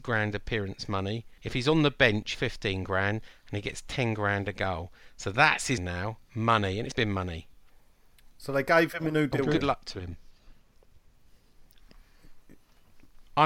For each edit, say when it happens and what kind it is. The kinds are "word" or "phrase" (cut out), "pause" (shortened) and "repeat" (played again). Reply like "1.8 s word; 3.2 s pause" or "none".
1.4 s pause; 2.3 s phrase; 5.8 s word; 6.9 s word

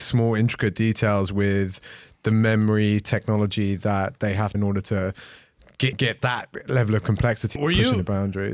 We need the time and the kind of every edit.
4.5 s phrase; 5.9 s word; 7.6 s phrase

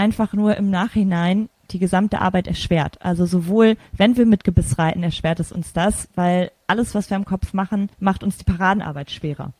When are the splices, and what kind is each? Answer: 7.9 s pause

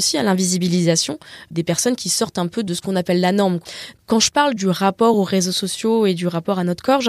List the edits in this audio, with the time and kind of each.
none

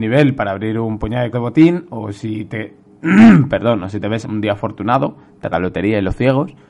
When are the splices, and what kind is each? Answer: 1.3 s word; 4.2 s word; 5.5 s word

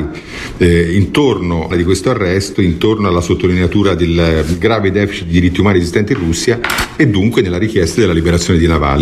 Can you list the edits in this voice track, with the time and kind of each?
1.7 s phrase

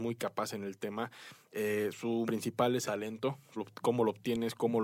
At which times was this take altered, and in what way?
2.3 s word; 2.8 s word; 3.6 s word

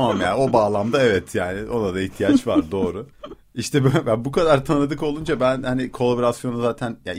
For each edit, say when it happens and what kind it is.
3.1 s pause

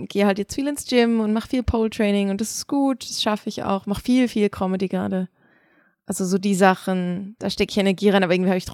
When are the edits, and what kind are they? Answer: none

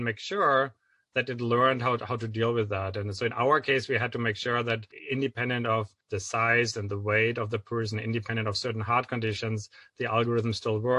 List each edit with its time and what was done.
none

